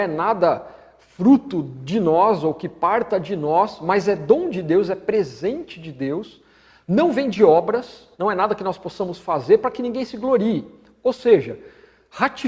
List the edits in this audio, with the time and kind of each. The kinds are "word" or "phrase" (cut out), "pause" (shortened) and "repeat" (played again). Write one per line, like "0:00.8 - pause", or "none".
0:08.1 - pause